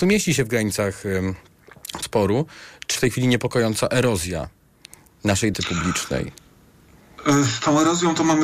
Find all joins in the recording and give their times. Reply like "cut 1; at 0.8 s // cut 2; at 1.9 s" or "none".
cut 1; at 2.0 s // cut 2; at 3.0 s // cut 3; at 5.5 s